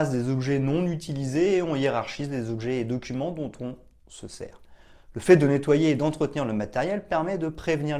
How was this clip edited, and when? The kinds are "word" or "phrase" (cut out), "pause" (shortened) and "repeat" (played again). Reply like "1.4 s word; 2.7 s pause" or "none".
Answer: none